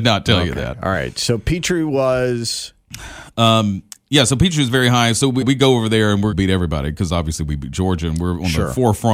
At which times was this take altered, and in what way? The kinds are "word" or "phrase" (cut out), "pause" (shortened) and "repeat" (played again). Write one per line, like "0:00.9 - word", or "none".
0:05.4 - word
0:06.3 - phrase